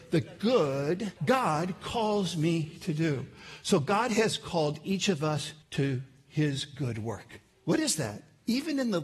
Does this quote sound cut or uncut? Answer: cut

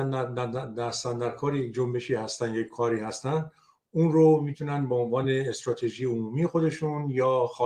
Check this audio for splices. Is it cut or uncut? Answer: uncut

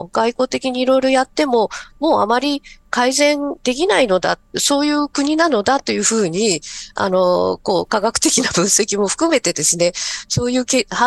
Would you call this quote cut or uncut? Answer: uncut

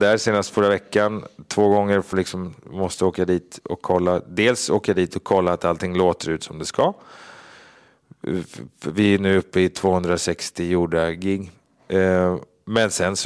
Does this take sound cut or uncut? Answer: cut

